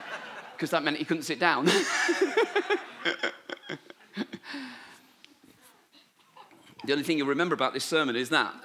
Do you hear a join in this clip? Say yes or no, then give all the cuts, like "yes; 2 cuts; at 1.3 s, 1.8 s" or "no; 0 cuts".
no; 0 cuts